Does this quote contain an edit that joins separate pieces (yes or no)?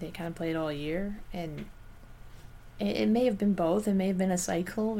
no